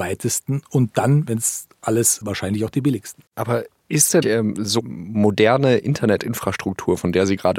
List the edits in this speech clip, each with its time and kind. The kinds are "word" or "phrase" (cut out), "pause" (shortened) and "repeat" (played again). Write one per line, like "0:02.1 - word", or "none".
0:02.2 - phrase
0:03.3 - pause
0:04.2 - word
0:04.8 - word